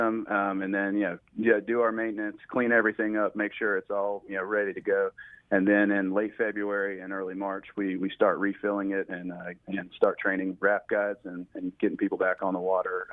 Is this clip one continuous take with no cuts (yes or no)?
yes